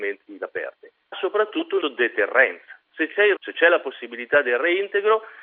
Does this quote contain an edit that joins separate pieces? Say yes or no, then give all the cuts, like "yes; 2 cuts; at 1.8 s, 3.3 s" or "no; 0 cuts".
yes; 3 cuts; at 1.1 s, 1.8 s, 3.4 s